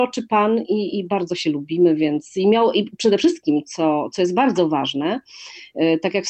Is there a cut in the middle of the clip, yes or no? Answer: no